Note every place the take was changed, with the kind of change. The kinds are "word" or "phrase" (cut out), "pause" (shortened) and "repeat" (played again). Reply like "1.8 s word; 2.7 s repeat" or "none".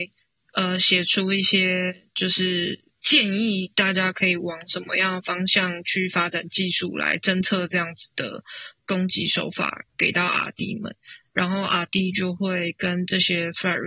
2.9 s pause

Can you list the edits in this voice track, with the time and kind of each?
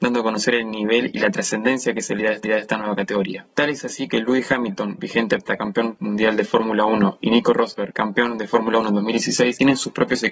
2.4 s repeat

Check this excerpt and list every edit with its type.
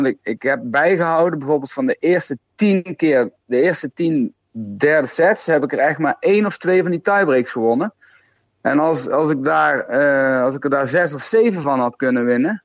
none

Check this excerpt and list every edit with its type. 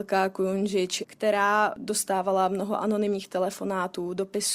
1.0 s word

